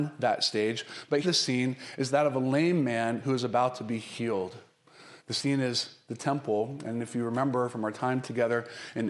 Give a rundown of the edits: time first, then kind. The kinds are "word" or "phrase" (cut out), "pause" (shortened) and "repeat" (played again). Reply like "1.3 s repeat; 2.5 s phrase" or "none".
1.2 s word; 5.2 s pause

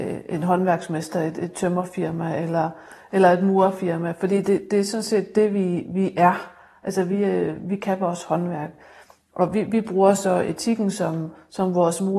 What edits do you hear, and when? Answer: none

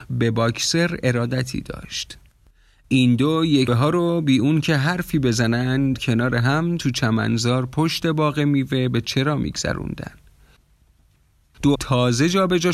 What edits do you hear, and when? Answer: 3.7 s word; 5.9 s word; 11.7 s word

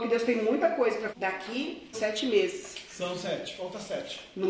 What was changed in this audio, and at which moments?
1.1 s word; 1.9 s phrase

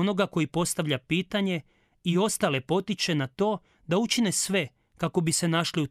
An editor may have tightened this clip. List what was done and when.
none

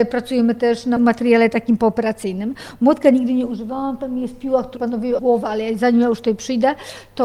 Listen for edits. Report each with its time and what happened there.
4.8 s word; 5.2 s word

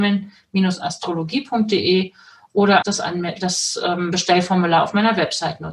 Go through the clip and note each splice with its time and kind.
2.8 s word

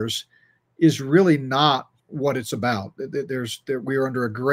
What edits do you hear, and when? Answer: 2.0 s pause

